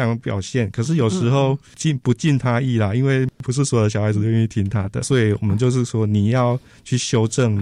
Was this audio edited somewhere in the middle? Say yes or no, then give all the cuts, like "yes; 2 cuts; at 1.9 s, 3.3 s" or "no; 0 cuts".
no; 0 cuts